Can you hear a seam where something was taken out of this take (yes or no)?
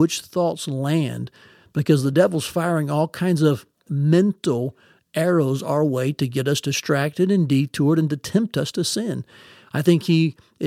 no